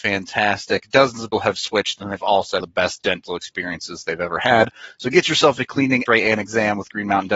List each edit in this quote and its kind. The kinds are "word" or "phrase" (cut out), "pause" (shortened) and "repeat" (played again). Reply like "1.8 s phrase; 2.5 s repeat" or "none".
1.3 s word; 2.6 s phrase; 6.1 s word